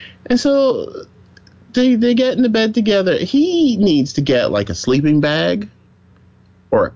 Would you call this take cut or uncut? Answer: uncut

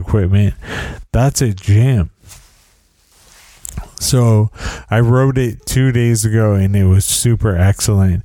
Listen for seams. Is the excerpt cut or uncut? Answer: uncut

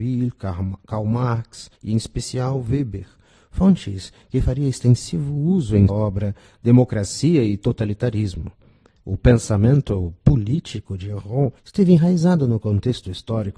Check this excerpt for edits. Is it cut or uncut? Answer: cut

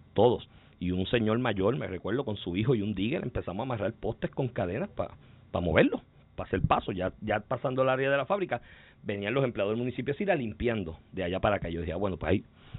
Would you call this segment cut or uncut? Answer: uncut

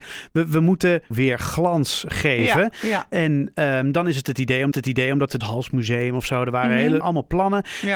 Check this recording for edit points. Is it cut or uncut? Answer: cut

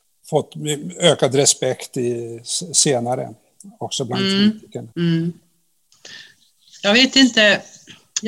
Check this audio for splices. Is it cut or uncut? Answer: cut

